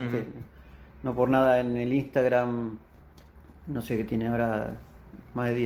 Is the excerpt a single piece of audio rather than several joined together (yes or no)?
yes